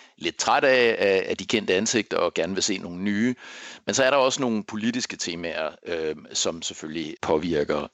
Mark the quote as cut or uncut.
uncut